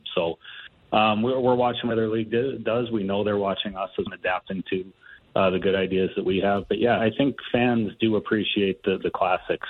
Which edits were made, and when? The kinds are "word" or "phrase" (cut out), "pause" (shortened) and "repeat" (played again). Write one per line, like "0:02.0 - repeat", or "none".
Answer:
0:01.9 - word
0:04.1 - word
0:07.0 - word